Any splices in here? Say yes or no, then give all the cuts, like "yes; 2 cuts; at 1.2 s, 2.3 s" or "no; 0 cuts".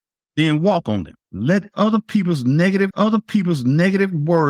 yes; 2 cuts; at 1.2 s, 2.9 s